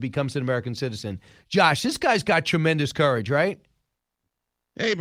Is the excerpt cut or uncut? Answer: uncut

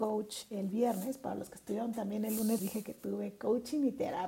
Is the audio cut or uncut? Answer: cut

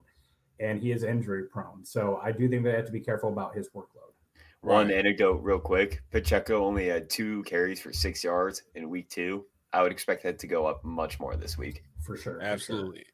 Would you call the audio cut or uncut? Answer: uncut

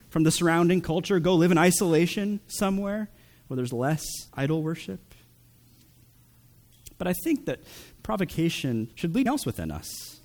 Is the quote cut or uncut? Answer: cut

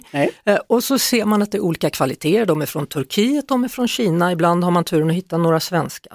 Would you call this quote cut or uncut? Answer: uncut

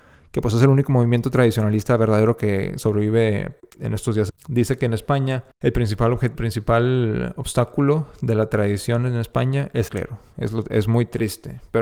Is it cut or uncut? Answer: cut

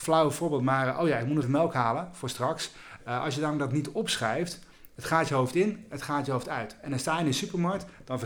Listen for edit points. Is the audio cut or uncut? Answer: cut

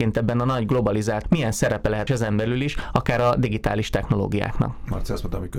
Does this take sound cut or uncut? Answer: cut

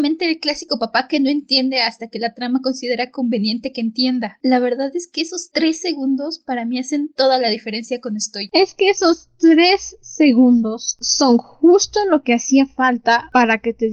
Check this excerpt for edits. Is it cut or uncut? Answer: uncut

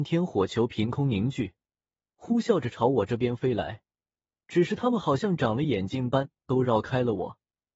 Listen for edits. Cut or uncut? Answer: uncut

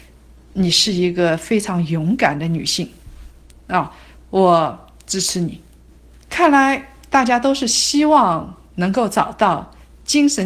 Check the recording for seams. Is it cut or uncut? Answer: uncut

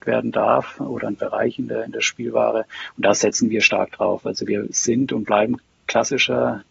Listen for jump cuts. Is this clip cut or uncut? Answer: uncut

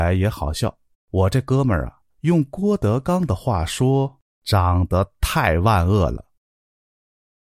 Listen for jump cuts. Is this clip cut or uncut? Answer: cut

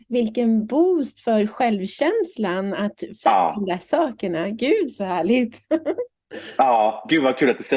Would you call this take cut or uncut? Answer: cut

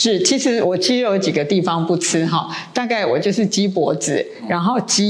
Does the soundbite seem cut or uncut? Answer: uncut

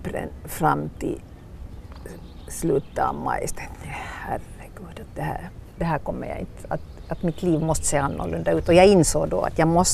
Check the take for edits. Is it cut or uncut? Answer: uncut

